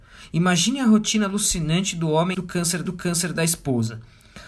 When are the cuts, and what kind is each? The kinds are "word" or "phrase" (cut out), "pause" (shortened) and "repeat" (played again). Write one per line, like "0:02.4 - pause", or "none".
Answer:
0:02.3 - word
0:02.9 - repeat